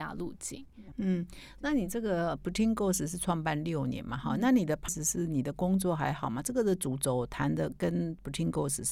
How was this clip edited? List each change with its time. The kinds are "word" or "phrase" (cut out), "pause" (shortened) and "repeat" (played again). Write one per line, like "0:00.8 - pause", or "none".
0:04.9 - phrase